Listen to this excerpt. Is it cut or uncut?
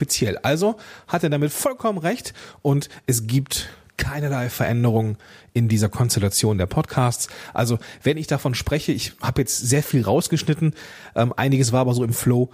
uncut